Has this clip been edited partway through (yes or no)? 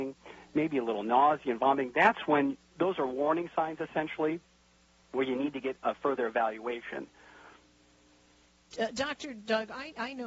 no